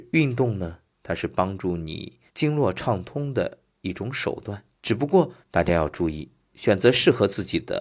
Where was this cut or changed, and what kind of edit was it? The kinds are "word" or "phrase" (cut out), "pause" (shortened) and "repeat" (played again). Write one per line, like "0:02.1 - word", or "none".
0:02.3 - pause
0:04.7 - pause
0:05.4 - pause